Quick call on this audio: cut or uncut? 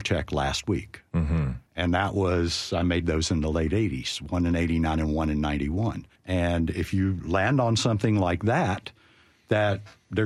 cut